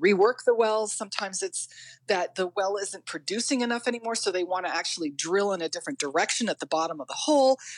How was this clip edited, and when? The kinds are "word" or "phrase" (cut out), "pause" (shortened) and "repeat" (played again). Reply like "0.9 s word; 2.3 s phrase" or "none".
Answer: none

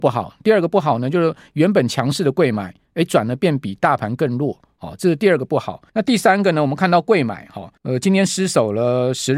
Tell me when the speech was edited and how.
5.9 s pause; 7.8 s pause

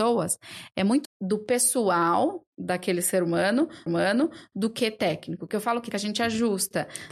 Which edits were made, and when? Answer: 1.0 s word; 2.5 s pause; 3.9 s repeat; 5.9 s word

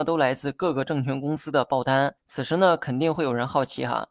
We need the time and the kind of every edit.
2.2 s pause

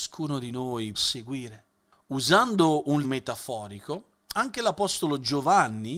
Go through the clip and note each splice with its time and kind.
0.9 s word; 3.0 s word

